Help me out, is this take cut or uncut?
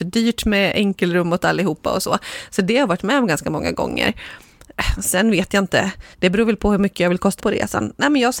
cut